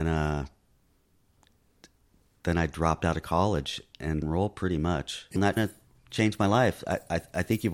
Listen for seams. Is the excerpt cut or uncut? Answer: cut